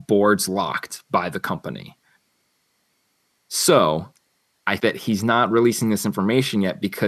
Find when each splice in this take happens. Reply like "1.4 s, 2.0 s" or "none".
4.8 s